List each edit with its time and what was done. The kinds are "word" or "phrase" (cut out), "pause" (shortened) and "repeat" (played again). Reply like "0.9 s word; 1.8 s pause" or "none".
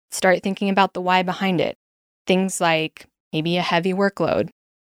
none